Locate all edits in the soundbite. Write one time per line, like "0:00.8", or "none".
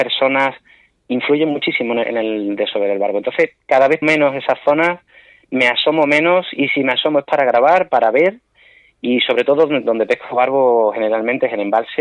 0:02.0
0:04.0